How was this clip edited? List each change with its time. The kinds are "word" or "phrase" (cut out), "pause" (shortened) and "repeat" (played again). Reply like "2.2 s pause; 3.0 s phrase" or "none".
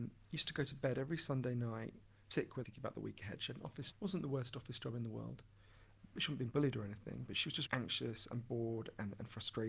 2.3 s word; 2.6 s word; 3.9 s word; 7.7 s word

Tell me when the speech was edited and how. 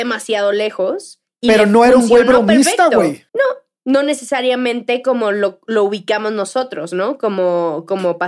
3.3 s pause

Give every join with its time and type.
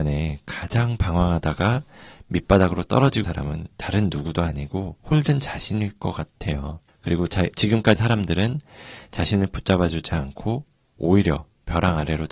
3.2 s word; 5.0 s pause; 6.9 s pause; 8.0 s word

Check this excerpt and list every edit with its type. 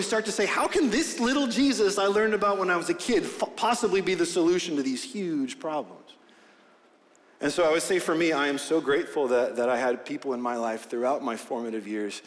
none

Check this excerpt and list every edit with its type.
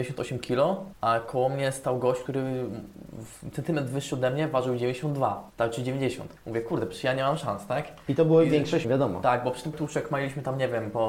8.8 s word; 9.7 s word

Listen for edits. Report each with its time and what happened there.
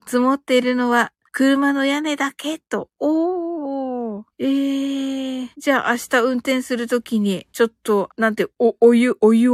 1.3 s pause; 4.3 s pause; 5.5 s pause; 7.5 s pause; 8.1 s word

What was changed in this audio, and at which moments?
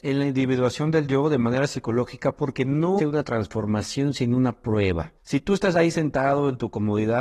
3.0 s word; 5.2 s pause

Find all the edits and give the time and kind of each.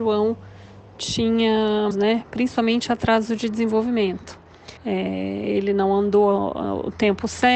1.9 s phrase; 4.8 s pause

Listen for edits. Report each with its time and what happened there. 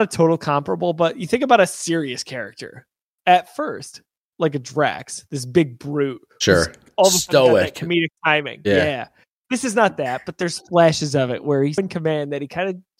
11.8 s word

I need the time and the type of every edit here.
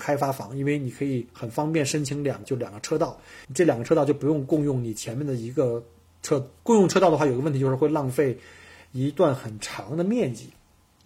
2.4 s phrase; 3.4 s pause; 6.6 s pause

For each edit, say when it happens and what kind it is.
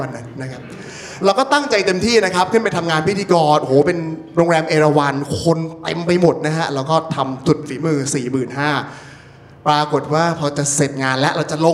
none

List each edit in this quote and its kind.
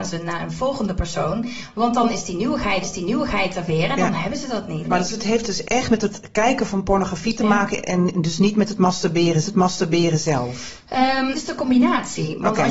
2.8 s repeat; 5.6 s word; 9.4 s repeat; 11.3 s word

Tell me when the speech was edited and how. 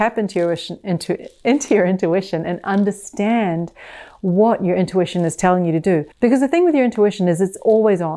6.1 s pause

